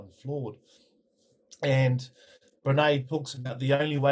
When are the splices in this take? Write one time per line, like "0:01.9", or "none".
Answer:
none